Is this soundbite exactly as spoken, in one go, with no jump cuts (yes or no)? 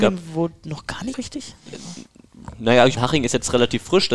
no